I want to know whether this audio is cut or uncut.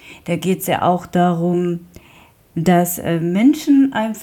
uncut